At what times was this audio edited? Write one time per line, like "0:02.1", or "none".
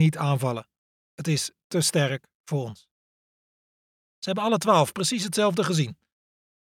none